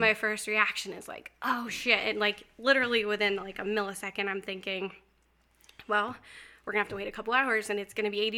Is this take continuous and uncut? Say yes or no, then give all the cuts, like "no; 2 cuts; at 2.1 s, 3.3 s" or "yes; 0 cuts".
yes; 0 cuts